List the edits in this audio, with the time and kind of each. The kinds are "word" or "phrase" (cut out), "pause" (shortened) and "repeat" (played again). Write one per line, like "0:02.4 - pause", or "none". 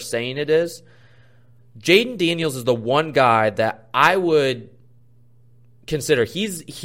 none